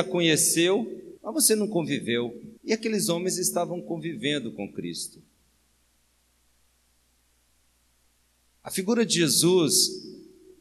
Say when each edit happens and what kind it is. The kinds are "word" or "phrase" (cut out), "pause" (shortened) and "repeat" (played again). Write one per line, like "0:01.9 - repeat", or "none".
0:01.2 - pause
0:02.6 - pause